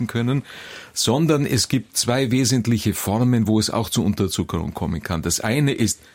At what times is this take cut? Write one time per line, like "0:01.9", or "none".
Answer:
none

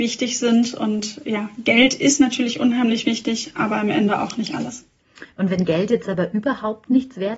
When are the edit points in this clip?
none

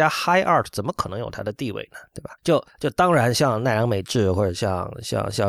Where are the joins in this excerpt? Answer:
0:02.4

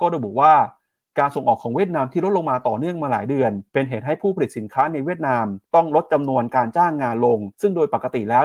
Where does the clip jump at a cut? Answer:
0:03.7
0:05.6
0:07.5

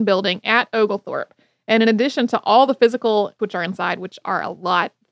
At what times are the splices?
0:03.4

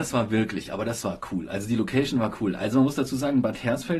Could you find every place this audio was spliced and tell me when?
none

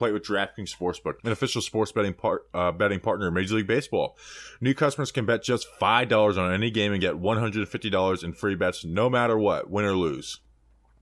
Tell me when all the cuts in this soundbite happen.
0:01.2

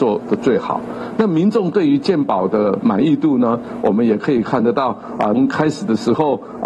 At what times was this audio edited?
0:05.3

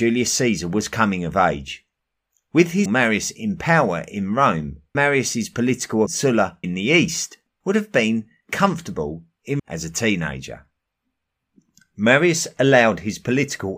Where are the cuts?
0:02.9
0:04.9
0:06.1
0:06.6
0:07.6
0:09.6

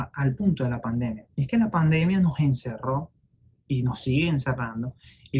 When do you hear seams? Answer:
0:01.3
0:03.3

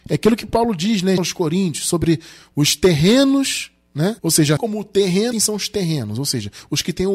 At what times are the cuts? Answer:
0:01.2
0:04.2
0:04.6
0:05.3

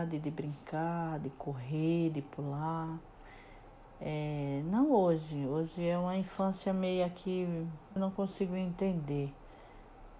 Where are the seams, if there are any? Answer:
0:08.0

